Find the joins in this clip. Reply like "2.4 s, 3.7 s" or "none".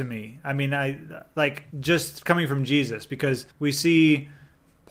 1.7 s, 3.5 s